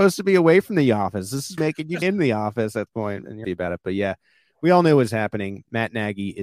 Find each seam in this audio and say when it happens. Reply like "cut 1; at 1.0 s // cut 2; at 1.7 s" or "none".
cut 1; at 1.6 s // cut 2; at 2.0 s // cut 3; at 2.9 s // cut 4; at 3.4 s